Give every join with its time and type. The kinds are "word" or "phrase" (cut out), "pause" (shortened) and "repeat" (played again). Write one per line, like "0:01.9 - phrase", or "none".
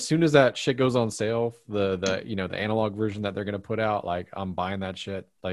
none